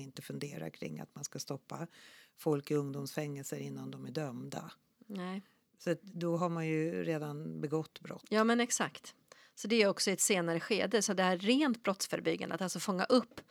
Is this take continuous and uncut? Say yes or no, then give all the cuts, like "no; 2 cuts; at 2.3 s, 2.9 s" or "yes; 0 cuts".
yes; 0 cuts